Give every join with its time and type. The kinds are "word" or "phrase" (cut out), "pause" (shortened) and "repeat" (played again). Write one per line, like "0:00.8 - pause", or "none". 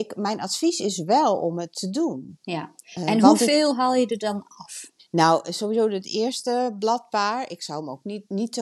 0:02.8 - pause
0:05.0 - pause